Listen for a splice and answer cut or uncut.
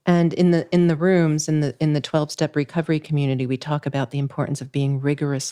uncut